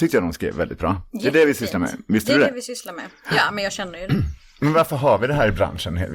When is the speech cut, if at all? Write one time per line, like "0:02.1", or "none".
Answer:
none